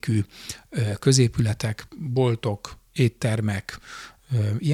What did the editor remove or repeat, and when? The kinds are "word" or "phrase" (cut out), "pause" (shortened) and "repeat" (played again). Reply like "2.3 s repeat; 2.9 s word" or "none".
1.9 s pause